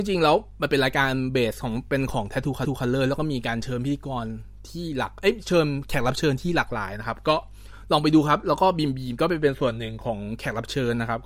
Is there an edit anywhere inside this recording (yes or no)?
yes